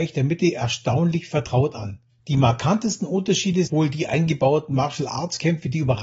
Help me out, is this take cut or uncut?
cut